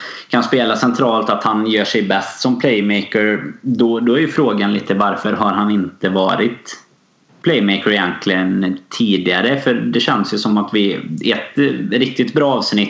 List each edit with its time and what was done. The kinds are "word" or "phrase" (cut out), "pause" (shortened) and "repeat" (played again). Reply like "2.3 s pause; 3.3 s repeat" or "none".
none